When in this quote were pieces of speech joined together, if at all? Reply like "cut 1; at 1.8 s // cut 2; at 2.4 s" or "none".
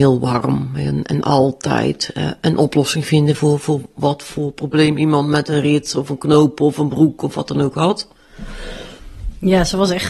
none